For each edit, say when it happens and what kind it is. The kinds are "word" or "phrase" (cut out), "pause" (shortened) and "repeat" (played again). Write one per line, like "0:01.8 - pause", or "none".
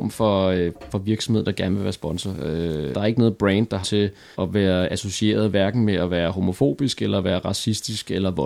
0:02.9 - word
0:03.8 - word
0:04.3 - word